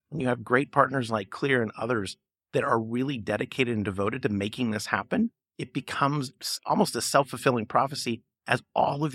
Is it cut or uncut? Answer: uncut